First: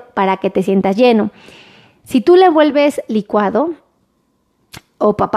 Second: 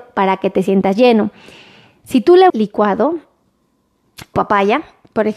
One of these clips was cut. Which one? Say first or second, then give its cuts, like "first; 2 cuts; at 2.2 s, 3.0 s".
second; 2 cuts; at 2.5 s, 4.3 s